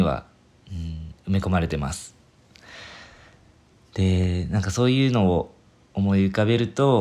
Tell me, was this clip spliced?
no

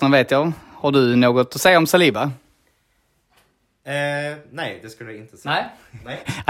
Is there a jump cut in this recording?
no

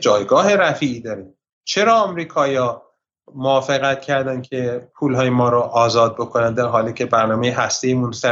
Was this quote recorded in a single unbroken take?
yes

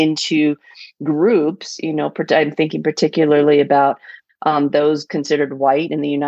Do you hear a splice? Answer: no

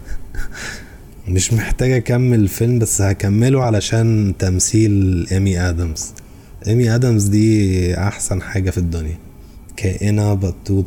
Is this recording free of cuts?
yes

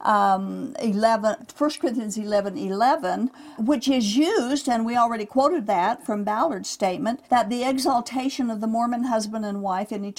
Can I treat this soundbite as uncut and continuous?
no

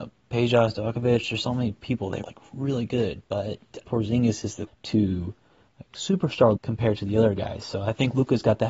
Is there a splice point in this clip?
yes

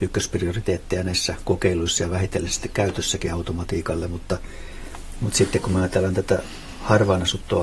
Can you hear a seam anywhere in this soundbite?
no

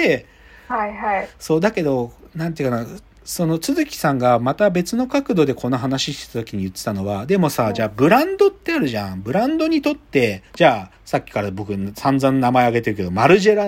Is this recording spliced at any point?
yes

